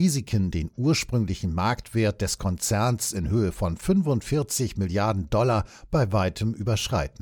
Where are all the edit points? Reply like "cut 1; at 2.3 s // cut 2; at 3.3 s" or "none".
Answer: none